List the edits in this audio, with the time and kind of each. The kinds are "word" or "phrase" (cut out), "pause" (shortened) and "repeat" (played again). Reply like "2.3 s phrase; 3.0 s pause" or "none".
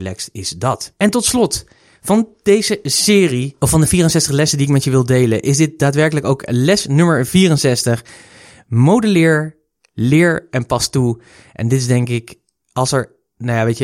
none